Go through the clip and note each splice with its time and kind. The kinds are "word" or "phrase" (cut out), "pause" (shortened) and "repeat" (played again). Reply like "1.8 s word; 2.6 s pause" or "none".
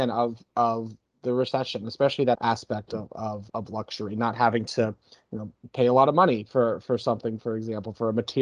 2.3 s word; 3.5 s word